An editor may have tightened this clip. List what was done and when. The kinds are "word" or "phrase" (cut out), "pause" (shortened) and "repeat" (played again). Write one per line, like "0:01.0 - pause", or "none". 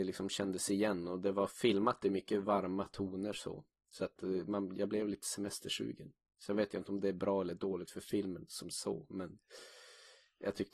none